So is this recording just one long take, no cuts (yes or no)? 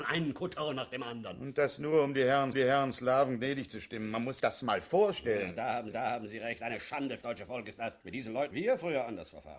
no